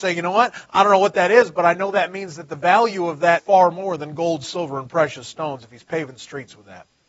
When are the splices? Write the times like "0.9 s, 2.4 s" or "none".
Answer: 3.4 s